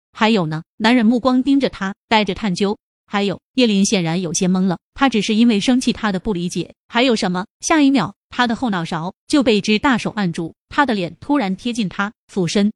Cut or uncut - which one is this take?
cut